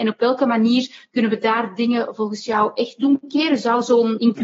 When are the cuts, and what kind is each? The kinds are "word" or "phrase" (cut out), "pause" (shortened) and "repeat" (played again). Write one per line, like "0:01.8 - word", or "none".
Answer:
none